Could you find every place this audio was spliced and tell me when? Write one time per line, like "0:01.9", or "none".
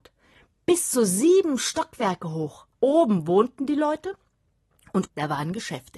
0:02.7
0:05.1